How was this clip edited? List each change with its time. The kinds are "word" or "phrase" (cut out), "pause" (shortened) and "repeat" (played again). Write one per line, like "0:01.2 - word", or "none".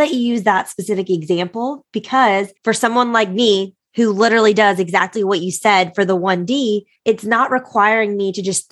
0:02.6 - pause
0:07.0 - pause